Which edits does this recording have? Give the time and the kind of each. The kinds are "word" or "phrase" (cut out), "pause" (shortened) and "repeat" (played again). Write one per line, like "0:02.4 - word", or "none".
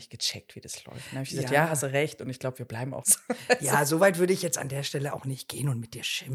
0:03.0 - word